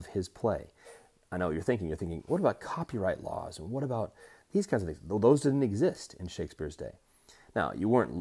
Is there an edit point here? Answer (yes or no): no